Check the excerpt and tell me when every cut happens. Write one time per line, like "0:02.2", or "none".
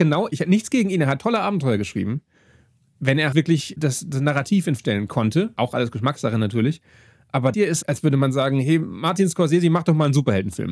0:03.3
0:04.8
0:05.6
0:07.5

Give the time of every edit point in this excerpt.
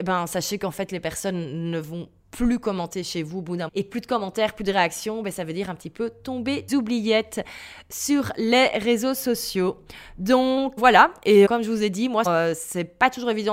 0:02.2
0:03.7
0:06.7
0:10.8
0:11.5
0:12.3

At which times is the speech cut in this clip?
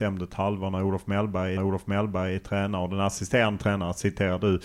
0:01.6

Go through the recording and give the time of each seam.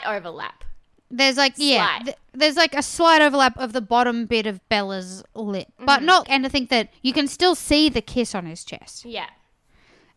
0:06.2
0:06.9

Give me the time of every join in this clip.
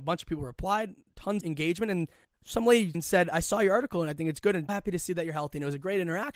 0:01.4
0:02.2
0:02.9
0:04.7

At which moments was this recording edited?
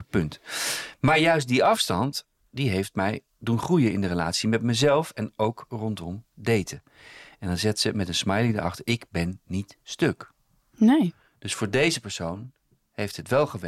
none

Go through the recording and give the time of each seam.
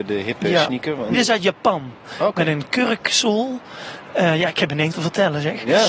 0:01.1
0:04.9

